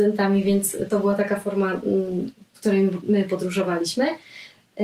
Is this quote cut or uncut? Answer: uncut